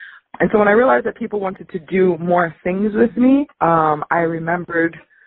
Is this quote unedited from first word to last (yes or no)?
no